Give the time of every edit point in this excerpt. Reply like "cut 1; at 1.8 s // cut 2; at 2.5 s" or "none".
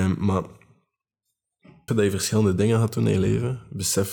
cut 1; at 1.9 s